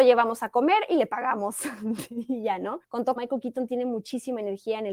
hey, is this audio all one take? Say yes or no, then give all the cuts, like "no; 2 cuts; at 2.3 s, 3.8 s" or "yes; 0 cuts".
no; 1 cut; at 3.2 s